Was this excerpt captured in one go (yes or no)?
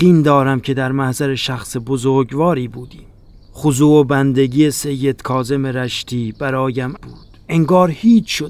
no